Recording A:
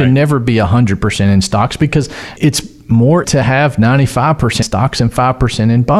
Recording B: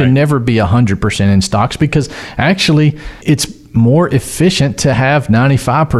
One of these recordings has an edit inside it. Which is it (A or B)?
A